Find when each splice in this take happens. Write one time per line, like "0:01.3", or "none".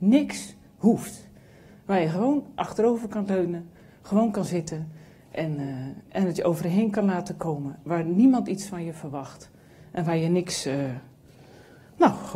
none